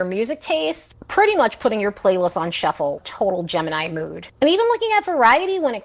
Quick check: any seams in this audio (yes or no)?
yes